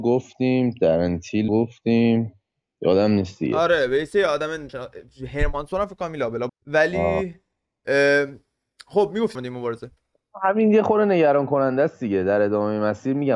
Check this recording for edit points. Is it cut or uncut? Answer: cut